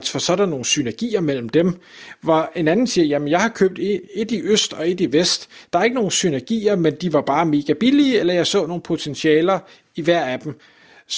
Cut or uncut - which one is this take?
uncut